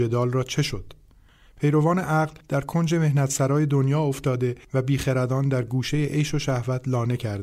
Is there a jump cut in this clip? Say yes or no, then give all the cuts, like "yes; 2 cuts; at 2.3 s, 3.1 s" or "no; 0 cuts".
no; 0 cuts